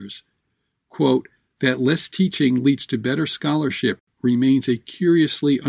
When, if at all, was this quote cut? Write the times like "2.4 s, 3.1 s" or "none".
none